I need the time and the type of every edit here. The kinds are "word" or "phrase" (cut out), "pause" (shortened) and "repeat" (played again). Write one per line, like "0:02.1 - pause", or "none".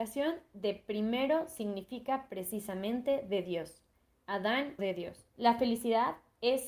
0:04.8 - word
0:05.3 - pause